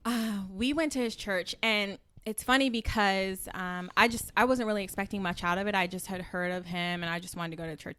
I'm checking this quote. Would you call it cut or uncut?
uncut